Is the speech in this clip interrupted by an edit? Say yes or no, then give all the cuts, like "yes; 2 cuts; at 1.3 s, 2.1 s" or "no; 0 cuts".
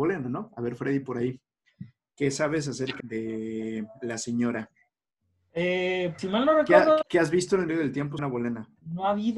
yes; 5 cuts; at 3.0 s, 6.2 s, 7.0 s, 7.7 s, 8.2 s